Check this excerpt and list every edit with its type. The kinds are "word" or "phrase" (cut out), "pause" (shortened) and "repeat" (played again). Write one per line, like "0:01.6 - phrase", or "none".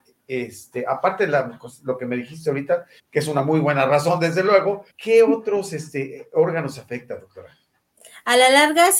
0:03.0 - pause
0:04.9 - pause